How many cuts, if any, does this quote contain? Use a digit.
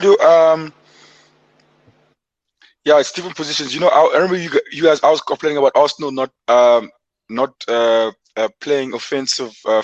2